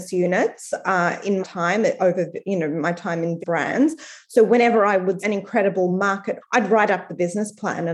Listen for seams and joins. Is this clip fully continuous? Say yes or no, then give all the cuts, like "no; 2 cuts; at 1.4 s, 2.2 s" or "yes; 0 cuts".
no; 4 cuts; at 1.4 s, 3.4 s, 5.2 s, 6.4 s